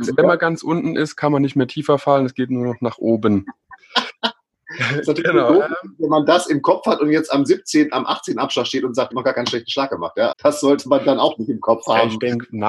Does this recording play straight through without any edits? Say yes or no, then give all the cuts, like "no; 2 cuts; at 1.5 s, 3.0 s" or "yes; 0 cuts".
no; 2 cuts; at 9.1 s, 10.3 s